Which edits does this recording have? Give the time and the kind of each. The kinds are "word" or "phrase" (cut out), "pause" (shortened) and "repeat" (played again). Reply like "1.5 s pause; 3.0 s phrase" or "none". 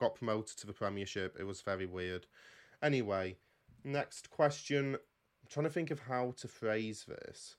none